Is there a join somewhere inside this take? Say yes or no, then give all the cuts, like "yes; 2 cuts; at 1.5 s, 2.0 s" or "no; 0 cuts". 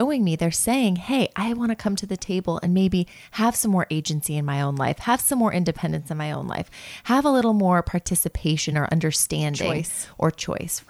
no; 0 cuts